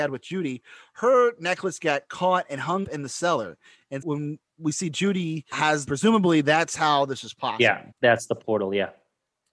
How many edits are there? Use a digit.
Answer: 5